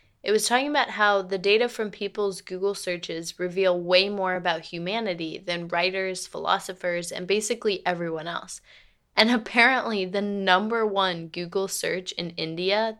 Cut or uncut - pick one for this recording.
uncut